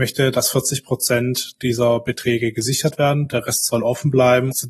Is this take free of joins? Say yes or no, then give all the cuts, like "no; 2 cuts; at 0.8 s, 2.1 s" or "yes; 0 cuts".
yes; 0 cuts